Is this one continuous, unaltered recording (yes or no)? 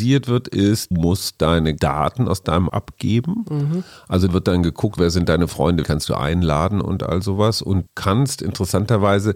no